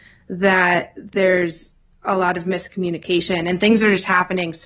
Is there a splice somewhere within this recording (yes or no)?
no